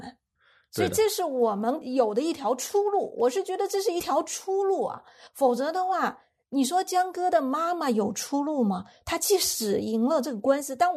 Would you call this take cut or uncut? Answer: uncut